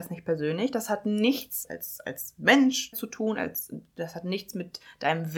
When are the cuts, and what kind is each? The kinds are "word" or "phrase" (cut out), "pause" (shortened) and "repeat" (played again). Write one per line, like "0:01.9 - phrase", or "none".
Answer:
0:01.6 - phrase
0:02.9 - word